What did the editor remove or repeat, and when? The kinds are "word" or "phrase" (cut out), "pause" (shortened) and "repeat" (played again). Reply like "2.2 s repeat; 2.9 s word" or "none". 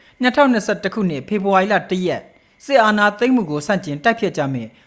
none